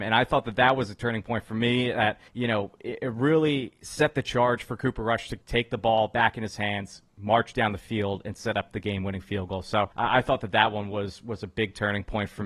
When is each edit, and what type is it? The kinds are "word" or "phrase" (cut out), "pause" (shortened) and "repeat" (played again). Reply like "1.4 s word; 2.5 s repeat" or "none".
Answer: 2.3 s pause; 5.4 s pause; 9.9 s pause